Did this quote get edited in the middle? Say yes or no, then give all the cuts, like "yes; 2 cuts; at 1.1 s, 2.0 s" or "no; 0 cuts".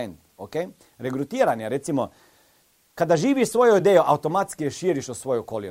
no; 0 cuts